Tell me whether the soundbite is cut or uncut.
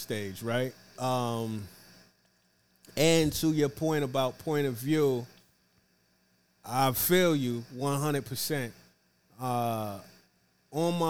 uncut